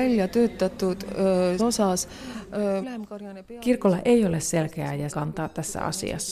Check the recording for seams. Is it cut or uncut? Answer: cut